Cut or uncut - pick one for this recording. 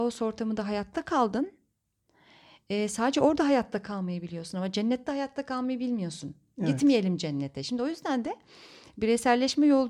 uncut